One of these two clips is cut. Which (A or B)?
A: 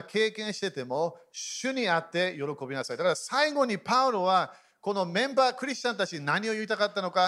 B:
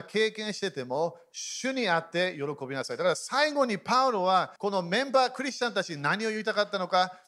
B